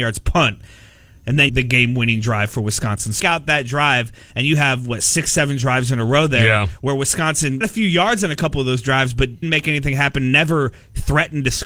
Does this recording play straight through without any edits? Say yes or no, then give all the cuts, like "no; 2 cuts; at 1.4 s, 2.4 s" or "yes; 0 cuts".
no; 4 cuts; at 1.5 s, 3.2 s, 7.6 s, 9.4 s